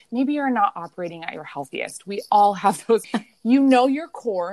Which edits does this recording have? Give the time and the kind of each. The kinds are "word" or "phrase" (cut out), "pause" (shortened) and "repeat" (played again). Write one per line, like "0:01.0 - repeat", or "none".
0:03.0 - word

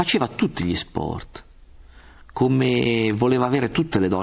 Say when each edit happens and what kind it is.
none

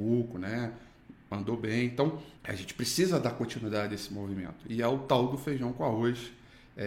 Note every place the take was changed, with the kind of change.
0:02.4 - pause

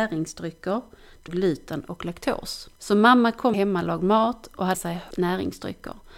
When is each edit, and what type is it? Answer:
0:01.3 - phrase
0:02.8 - pause
0:03.5 - word
0:04.7 - word
0:05.1 - word

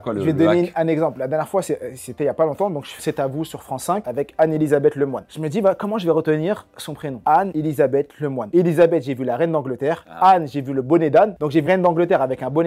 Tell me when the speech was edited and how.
0:03.0 - word
0:11.7 - word

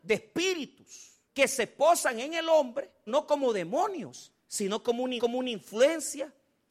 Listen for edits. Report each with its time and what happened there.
0:01.3 - pause
0:03.1 - word
0:04.4 - pause
0:05.2 - repeat

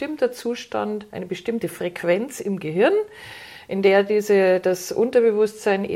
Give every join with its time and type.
none

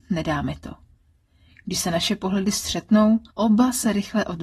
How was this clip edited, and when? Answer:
0:03.3 - pause

